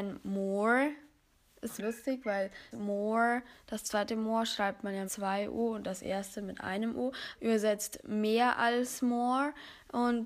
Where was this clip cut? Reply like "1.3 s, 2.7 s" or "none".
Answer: 1.8 s, 2.7 s, 5.1 s, 7.3 s